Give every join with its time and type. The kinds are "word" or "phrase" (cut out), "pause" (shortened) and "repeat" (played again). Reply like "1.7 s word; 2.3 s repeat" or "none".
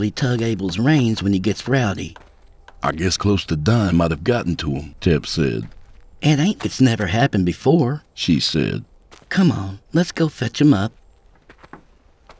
3.2 s word; 6.6 s word; 9.9 s pause